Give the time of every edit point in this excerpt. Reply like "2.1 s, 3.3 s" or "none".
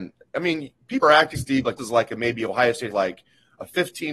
1.0 s, 1.3 s, 1.8 s, 2.9 s